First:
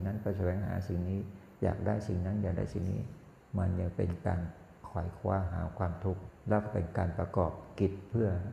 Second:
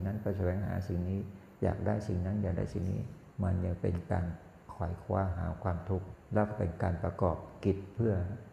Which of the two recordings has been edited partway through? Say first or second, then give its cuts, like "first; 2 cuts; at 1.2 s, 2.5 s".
second; 1 cut; at 3.3 s